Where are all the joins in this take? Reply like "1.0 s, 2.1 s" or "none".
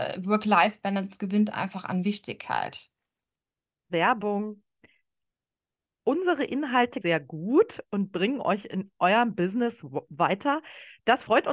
7.0 s

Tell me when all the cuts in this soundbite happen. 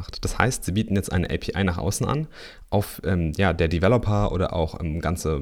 none

